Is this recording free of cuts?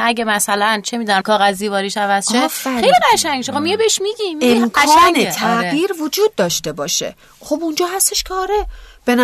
no; 1 cut; at 1.2 s

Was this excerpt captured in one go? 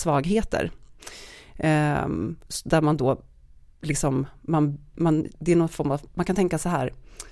yes; 0 cuts

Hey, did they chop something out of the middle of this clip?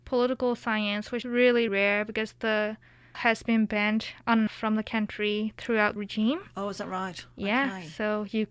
yes; 5 cuts; at 1.2 s, 1.7 s, 3.1 s, 4.5 s, 6.0 s

